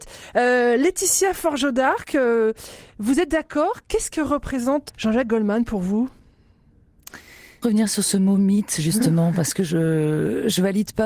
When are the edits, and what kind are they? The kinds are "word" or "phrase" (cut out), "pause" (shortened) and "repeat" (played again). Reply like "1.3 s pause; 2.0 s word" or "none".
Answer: 4.9 s word; 7.6 s phrase